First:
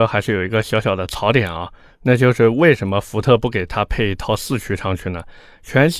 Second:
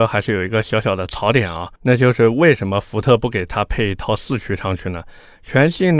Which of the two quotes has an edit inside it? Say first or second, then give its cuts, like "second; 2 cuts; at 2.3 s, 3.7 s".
second; 1 cut; at 1.8 s